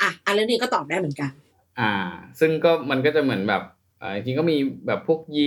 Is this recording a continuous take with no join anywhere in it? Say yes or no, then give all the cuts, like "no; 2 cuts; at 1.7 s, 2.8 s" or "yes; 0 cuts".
yes; 0 cuts